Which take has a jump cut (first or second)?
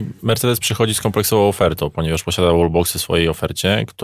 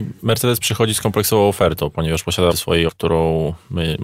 second